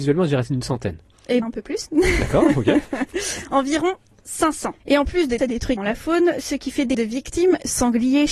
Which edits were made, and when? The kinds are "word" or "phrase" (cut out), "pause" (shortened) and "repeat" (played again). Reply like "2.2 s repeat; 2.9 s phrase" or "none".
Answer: 1.4 s word; 4.8 s pause; 5.4 s phrase; 5.8 s word; 6.9 s word